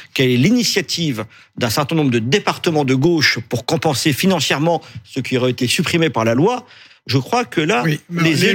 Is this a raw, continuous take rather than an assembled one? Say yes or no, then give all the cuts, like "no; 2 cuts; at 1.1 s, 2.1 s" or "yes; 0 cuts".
yes; 0 cuts